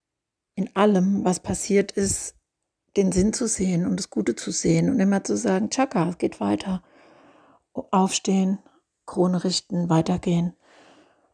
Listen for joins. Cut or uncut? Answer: uncut